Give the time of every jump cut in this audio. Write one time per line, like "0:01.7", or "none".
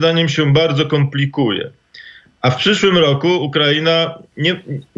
none